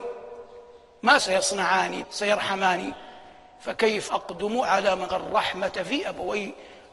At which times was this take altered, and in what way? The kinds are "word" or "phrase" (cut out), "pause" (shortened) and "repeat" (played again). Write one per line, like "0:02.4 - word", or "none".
0:01.2 - word
0:02.0 - word
0:04.1 - word
0:05.1 - word